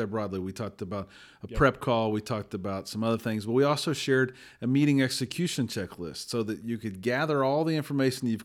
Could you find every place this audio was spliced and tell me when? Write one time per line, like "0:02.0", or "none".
none